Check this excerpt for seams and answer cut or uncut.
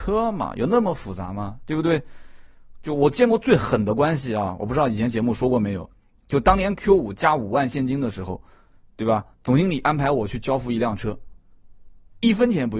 cut